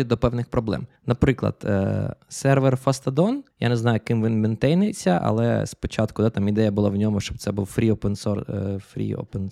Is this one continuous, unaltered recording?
no; 2 cuts; at 1.0 s, 3.5 s

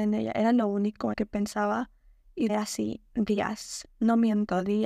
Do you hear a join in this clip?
yes; 2 cuts; at 1.1 s, 2.5 s

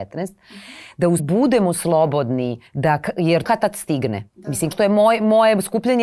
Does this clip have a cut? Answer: yes; 5 cuts; at 1.2 s, 2.7 s, 3.4 s, 4.3 s, 4.7 s

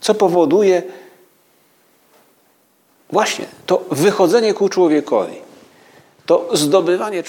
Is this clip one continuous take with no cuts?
yes; 0 cuts

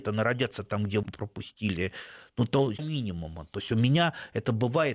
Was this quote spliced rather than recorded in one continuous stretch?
yes; 2 cuts; at 1.0 s, 2.8 s

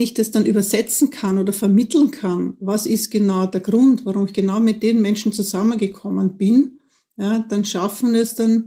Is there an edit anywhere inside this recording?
no; 0 cuts

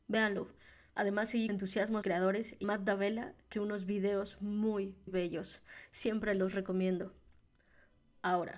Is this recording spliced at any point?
yes; 5 cuts; at 1.5 s, 2.0 s, 2.6 s, 3.5 s, 5.1 s

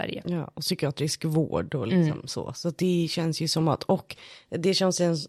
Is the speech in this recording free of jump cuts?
yes; 0 cuts

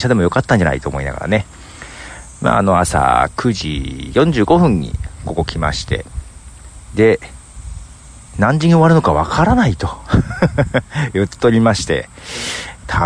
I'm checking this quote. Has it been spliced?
no; 0 cuts

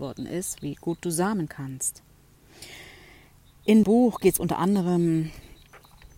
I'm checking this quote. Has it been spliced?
yes; 2 cuts; at 1.5 s, 3.8 s

